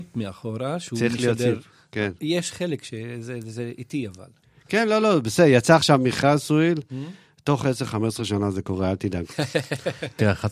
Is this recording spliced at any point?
no; 0 cuts

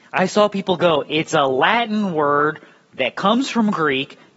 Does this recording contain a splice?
no; 0 cuts

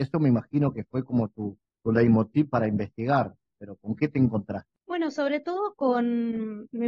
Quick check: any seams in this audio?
no; 0 cuts

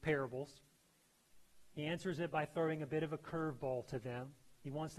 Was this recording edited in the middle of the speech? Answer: no; 0 cuts

